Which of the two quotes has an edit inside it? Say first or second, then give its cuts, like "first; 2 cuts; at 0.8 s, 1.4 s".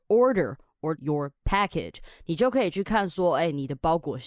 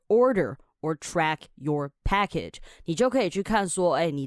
first; 1 cut; at 1.0 s